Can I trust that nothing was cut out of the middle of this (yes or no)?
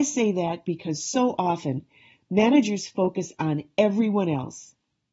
yes